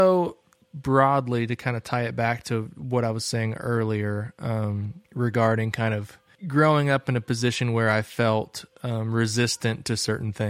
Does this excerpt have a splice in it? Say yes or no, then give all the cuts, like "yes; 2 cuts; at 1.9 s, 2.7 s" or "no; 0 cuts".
yes; 1 cut; at 5.0 s